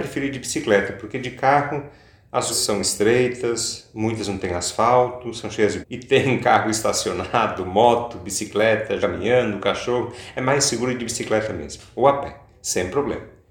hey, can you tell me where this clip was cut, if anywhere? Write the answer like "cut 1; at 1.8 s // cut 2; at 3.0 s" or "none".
cut 1; at 2.5 s // cut 2; at 5.8 s // cut 3; at 9.0 s